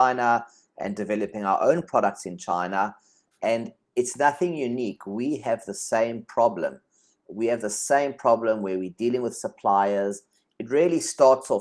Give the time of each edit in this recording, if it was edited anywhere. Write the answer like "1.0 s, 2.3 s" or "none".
none